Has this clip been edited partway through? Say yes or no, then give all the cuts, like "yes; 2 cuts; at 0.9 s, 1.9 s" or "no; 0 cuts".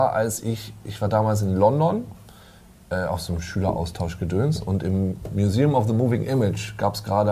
no; 0 cuts